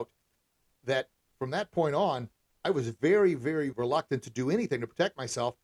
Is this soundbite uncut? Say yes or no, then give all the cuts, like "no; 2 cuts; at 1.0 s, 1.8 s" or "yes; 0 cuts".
no; 2 cuts; at 2.5 s, 3.7 s